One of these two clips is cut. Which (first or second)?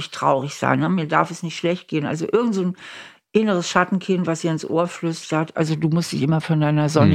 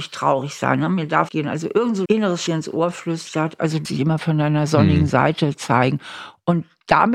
second